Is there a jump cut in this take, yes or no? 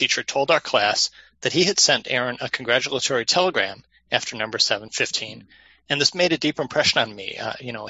no